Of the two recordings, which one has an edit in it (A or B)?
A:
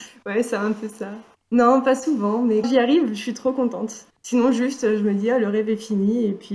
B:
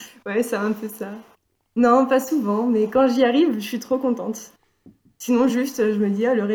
A